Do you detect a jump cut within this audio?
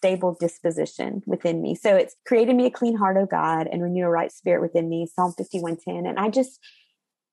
yes; 1 cut; at 2.2 s

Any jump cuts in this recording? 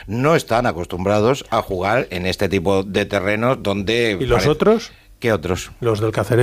no; 0 cuts

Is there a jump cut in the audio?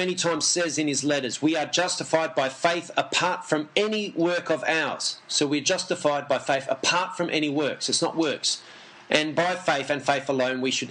no; 0 cuts

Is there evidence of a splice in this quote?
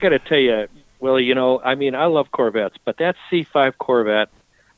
no; 0 cuts

